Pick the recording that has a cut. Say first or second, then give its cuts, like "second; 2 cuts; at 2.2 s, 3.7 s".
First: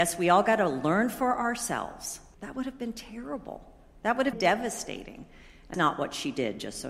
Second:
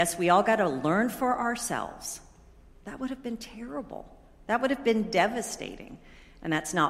first; 3 cuts; at 2.3 s, 4.3 s, 5.7 s